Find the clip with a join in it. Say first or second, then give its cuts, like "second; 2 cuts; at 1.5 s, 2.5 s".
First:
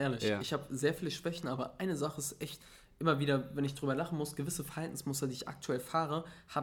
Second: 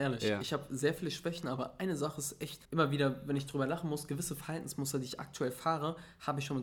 second; 1 cut; at 2.6 s